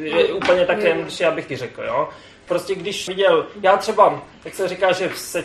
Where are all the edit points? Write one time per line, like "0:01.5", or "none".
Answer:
0:01.5
0:03.1